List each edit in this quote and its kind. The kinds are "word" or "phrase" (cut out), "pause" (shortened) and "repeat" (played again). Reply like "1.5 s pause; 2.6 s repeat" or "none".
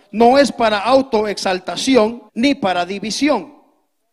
2.3 s pause